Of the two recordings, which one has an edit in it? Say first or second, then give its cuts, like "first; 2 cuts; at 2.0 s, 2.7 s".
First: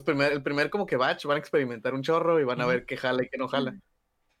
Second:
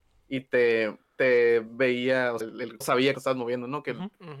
second; 3 cuts; at 2.4 s, 2.8 s, 3.1 s